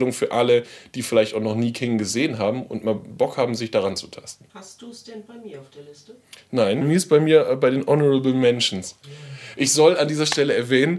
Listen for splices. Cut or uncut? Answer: cut